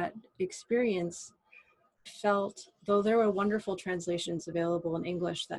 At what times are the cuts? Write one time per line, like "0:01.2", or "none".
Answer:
0:02.1